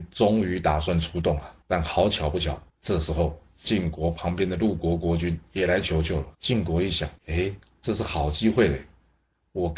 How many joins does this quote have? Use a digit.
4